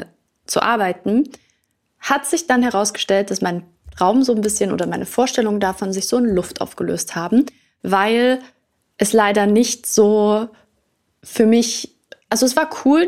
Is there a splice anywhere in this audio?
no; 0 cuts

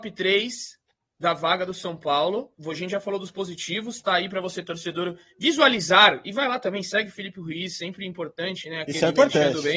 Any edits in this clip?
yes; 1 cut; at 2.6 s

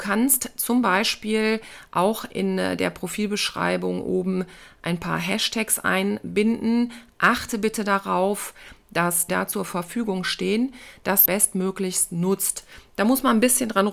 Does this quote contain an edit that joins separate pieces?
yes; 2 cuts; at 9.3 s, 11.3 s

